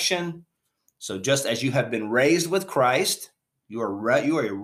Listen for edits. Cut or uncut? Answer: uncut